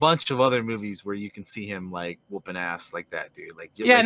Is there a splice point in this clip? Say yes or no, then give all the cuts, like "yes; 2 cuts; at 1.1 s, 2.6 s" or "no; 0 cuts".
no; 0 cuts